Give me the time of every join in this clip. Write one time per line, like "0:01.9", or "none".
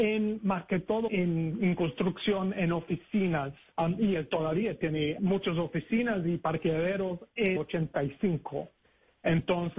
0:01.1
0:03.7
0:05.2
0:07.6